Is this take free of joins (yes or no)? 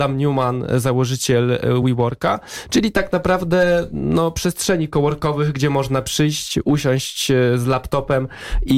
yes